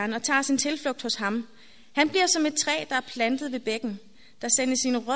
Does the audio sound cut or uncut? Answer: uncut